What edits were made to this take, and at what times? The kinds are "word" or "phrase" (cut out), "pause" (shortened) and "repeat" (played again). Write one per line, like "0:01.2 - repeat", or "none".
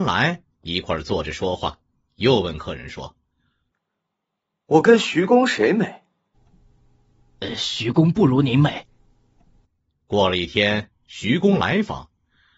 none

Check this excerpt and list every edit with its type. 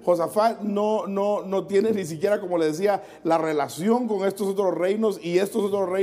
none

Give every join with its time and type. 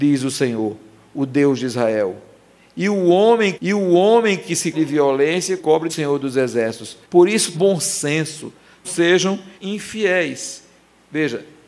0:03.5 - repeat
0:04.7 - word
0:05.6 - phrase
0:05.9 - phrase
0:07.0 - pause
0:07.5 - word
0:08.8 - word
0:09.6 - pause

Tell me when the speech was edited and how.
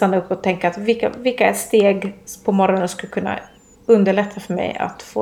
none

